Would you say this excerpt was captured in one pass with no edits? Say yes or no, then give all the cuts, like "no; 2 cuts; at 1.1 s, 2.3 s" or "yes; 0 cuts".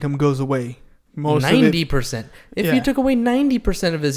yes; 0 cuts